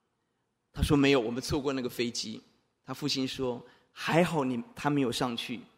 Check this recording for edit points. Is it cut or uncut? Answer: uncut